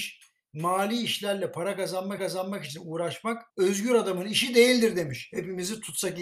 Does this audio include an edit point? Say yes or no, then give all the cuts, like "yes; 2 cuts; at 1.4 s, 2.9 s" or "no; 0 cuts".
yes; 2 cuts; at 2.2 s, 3.5 s